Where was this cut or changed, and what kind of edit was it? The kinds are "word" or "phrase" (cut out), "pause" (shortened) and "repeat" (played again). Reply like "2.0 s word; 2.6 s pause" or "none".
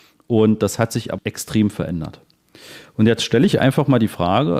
1.2 s word